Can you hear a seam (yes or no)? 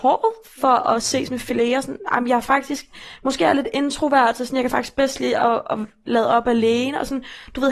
no